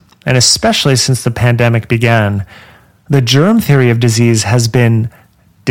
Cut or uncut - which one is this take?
uncut